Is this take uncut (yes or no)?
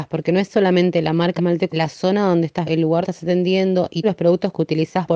no